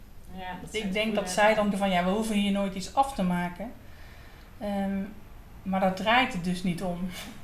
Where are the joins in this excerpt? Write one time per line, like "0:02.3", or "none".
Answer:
0:01.7